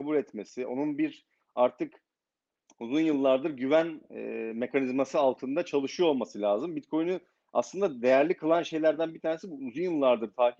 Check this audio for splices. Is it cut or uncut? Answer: uncut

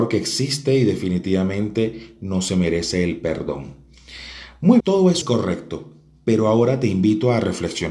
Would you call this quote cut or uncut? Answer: cut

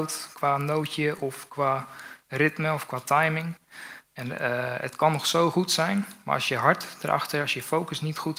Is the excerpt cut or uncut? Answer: uncut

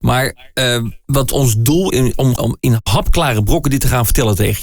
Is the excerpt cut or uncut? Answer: cut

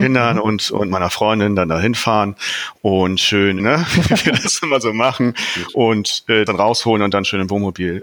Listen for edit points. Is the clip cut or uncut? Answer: cut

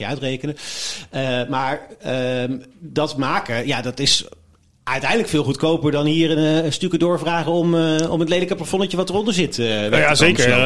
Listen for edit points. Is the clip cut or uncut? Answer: uncut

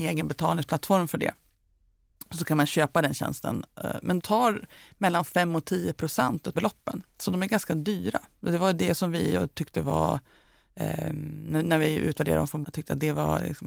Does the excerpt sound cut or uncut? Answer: cut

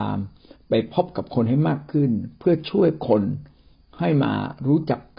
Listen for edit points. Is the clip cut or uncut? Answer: uncut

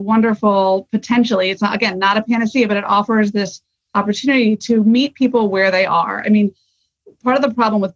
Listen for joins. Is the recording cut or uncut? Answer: uncut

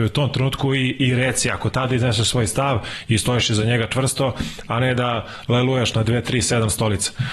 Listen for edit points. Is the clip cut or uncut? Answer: uncut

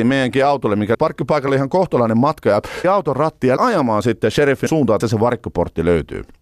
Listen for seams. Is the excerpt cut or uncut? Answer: cut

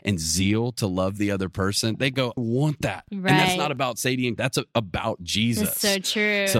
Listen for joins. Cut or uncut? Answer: cut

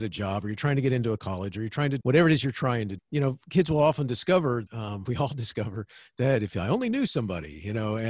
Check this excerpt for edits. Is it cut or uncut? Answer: cut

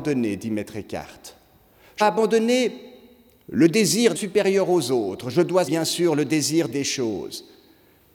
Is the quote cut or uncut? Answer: cut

